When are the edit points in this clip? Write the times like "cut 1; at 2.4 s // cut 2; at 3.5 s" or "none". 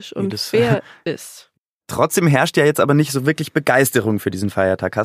none